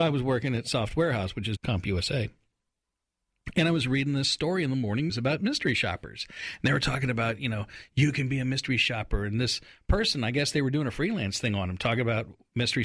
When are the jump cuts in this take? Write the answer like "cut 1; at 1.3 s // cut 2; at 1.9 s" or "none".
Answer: cut 1; at 1.6 s // cut 2; at 5.1 s

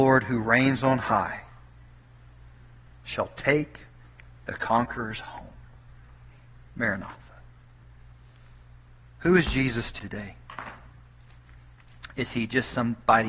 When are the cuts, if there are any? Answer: cut 1; at 10.0 s

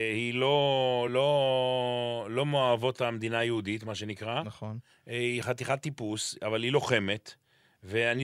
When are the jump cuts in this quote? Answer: cut 1; at 1.1 s

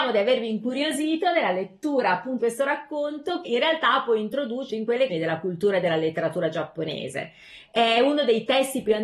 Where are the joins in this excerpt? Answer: cut 1; at 2.4 s // cut 2; at 3.4 s // cut 3; at 4.7 s // cut 4; at 5.1 s

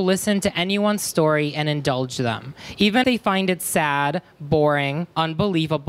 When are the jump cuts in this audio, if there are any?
cut 1; at 3.0 s

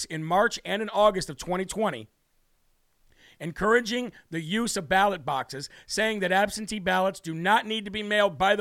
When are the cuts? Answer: none

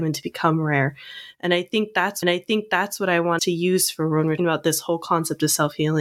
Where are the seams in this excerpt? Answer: cut 1; at 2.2 s // cut 2; at 3.4 s // cut 3; at 4.4 s

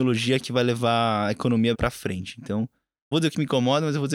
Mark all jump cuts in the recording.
cut 1; at 1.7 s // cut 2; at 3.1 s

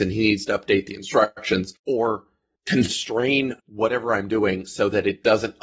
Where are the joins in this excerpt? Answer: cut 1; at 1.8 s // cut 2; at 3.6 s

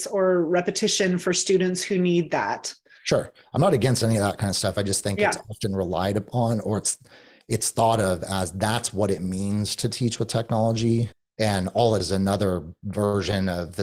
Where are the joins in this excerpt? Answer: cut 1; at 12.0 s

